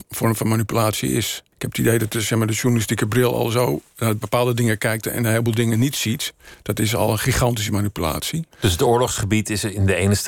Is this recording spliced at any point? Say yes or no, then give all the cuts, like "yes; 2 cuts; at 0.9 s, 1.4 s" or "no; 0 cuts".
yes; 2 cuts; at 1.5 s, 8.5 s